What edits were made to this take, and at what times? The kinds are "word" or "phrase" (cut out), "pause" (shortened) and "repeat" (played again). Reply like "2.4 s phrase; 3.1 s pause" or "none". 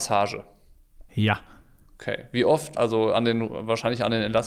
1.1 s pause; 2.8 s word

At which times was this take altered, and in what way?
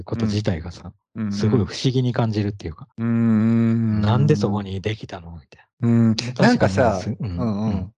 2.9 s pause; 5.7 s pause

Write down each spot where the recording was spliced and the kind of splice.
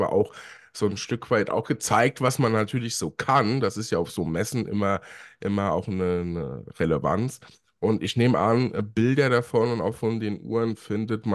none

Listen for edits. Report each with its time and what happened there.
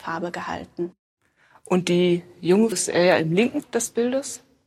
2.7 s word; 3.6 s word

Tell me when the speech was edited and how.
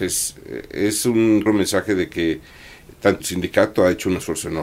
1.5 s word; 3.2 s word

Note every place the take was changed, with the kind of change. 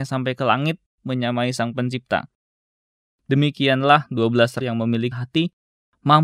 1.0 s word; 4.6 s word; 5.1 s word

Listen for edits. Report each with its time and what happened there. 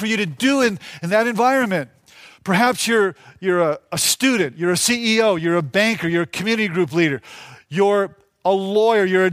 none

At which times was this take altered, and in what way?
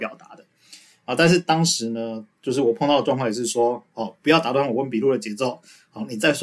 none

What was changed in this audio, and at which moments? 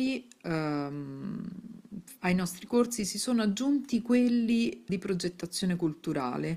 2.2 s pause; 4.9 s word

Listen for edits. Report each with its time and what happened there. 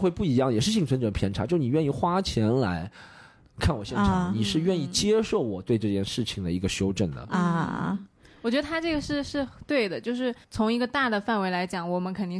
10.4 s pause

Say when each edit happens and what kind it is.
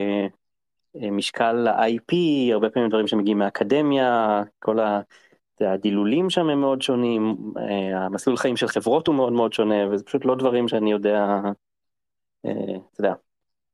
none

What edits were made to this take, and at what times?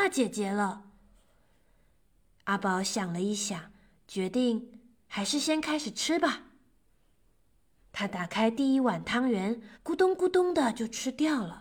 9.7 s pause

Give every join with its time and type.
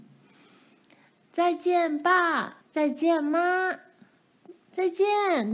2.6 s pause

